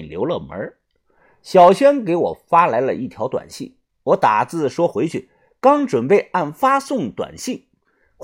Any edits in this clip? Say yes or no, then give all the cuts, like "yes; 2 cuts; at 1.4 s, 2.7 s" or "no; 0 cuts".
no; 0 cuts